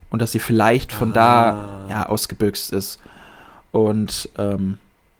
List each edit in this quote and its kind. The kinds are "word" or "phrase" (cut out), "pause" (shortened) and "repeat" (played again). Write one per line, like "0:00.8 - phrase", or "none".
none